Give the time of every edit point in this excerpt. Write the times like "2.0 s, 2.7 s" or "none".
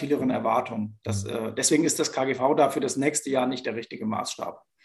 none